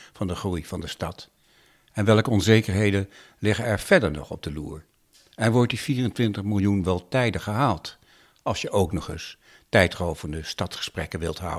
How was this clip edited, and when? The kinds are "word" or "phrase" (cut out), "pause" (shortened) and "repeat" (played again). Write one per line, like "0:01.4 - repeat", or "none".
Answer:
none